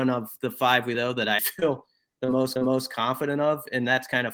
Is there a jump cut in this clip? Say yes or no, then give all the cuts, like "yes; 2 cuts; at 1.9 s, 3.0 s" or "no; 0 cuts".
yes; 3 cuts; at 0.9 s, 1.4 s, 2.6 s